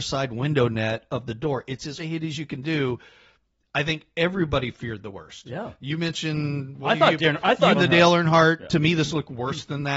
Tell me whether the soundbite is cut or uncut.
cut